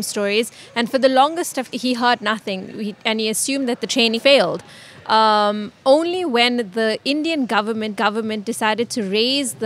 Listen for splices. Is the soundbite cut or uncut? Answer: cut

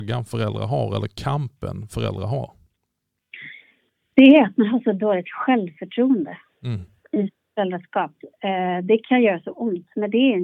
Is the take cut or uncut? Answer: uncut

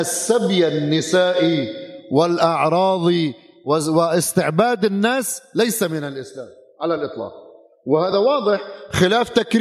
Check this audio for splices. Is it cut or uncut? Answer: uncut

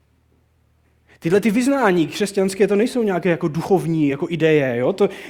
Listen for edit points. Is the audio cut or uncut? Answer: uncut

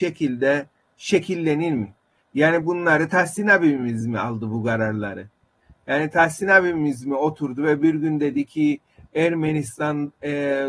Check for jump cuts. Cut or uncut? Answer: uncut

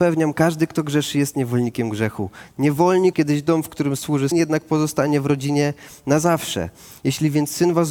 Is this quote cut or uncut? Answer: cut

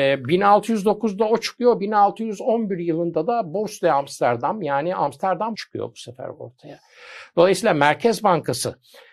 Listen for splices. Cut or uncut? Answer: cut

